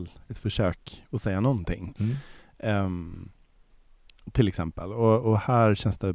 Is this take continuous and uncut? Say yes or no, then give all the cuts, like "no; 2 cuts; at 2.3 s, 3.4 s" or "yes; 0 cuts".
yes; 0 cuts